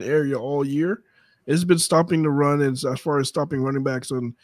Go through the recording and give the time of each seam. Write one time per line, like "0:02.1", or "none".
none